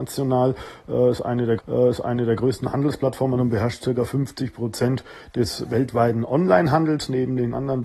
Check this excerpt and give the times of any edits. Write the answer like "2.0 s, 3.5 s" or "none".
1.6 s